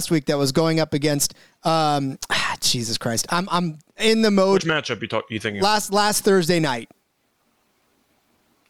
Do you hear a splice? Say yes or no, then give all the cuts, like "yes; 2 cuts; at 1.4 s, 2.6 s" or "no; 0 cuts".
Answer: yes; 1 cut; at 4.6 s